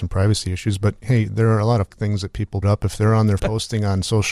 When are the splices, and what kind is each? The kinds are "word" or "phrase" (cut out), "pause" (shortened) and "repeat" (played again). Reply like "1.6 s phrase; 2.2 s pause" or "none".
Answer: 1.9 s word; 2.6 s word; 3.4 s word